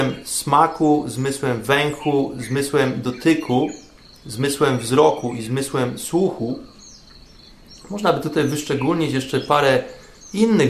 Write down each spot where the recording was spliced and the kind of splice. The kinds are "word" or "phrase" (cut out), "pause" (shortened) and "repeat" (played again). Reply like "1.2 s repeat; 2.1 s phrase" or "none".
none